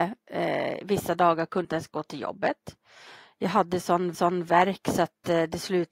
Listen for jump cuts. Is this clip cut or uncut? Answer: cut